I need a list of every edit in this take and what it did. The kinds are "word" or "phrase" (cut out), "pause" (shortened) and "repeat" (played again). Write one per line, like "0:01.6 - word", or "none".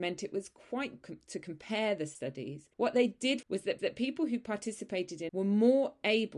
0:01.0 - word
0:02.7 - pause
0:03.4 - phrase
0:03.8 - repeat
0:05.3 - word